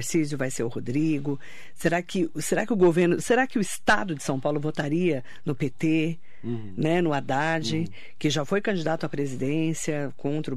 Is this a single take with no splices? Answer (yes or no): yes